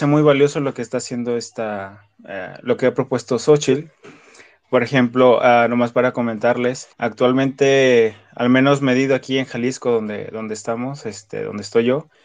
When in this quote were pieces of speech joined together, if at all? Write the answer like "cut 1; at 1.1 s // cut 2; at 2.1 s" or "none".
cut 1; at 6.9 s